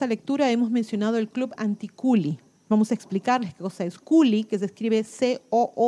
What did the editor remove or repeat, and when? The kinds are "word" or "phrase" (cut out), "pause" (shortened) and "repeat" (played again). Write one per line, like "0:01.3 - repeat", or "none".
none